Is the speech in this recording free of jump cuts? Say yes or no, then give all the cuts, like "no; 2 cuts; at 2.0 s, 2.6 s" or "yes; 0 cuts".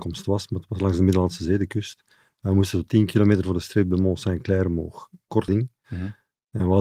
no; 1 cut; at 5.5 s